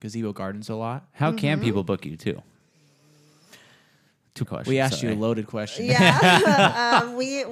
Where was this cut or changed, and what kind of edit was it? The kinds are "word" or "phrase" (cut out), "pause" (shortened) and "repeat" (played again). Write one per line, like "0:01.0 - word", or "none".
0:04.5 - word